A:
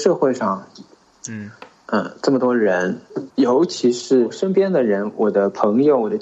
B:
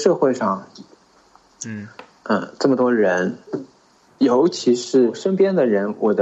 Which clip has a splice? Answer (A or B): A